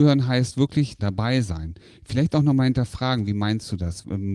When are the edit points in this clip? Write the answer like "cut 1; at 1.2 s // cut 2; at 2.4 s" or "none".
cut 1; at 1.0 s